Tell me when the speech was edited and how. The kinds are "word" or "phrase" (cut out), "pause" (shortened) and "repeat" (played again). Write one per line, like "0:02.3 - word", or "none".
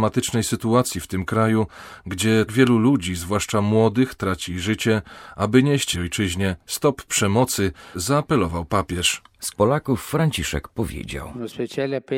0:02.5 - word
0:05.9 - phrase
0:07.9 - phrase
0:09.5 - phrase